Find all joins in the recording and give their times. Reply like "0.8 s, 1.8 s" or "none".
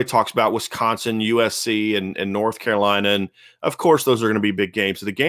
none